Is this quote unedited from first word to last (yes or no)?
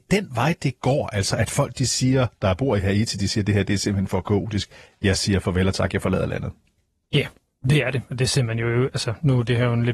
yes